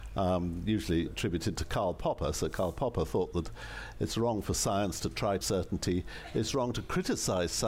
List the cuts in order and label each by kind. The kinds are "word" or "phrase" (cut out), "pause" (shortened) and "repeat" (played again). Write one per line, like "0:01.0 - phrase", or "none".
0:01.1 - word
0:05.4 - phrase